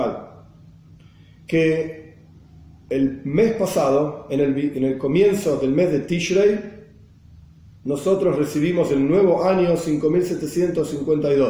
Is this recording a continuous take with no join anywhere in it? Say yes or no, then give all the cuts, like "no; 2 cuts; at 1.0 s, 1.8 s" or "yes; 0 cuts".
yes; 0 cuts